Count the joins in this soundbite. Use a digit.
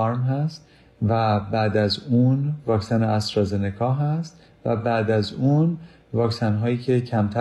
0